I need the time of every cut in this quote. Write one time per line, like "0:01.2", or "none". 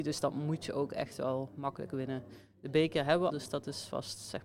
0:03.3